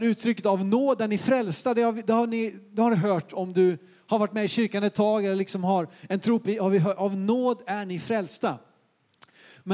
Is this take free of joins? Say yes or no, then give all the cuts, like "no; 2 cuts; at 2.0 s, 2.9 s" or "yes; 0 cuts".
no; 1 cut; at 6.4 s